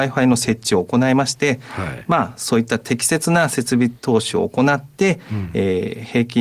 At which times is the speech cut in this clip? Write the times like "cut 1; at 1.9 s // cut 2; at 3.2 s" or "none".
cut 1; at 4.0 s